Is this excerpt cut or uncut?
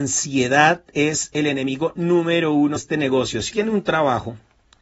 cut